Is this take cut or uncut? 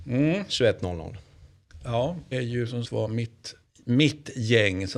cut